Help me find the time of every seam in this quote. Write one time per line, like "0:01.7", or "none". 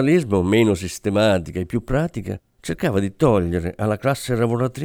none